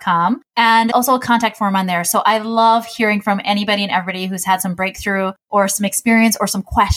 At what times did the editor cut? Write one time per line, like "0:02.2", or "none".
0:00.9

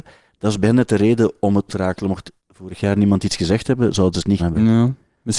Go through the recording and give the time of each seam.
0:01.7
0:02.4
0:04.4

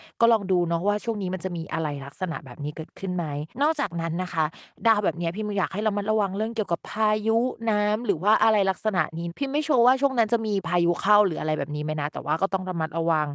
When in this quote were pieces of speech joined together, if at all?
0:03.5

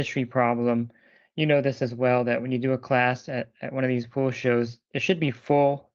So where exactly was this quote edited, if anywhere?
none

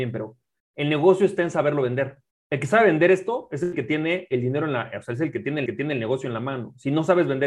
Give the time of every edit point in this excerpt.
0:02.3
0:05.7

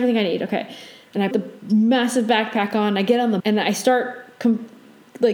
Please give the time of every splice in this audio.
0:01.3
0:03.4

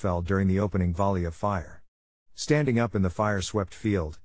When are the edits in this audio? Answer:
none

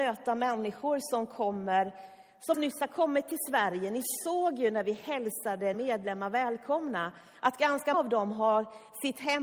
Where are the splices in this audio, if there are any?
0:02.5
0:05.7
0:07.9

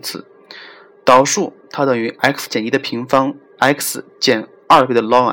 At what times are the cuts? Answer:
none

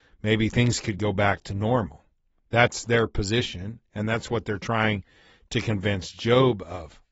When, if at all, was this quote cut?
none

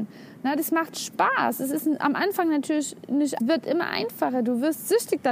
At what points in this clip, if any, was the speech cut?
0:03.4

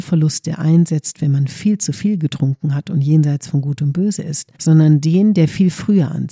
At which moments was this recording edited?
0:04.5

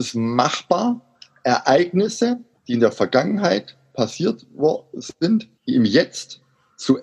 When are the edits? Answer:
0:02.5
0:05.6

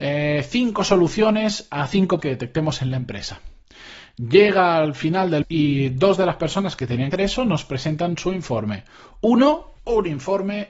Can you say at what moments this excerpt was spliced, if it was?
0:02.2
0:05.4
0:07.1
0:09.8

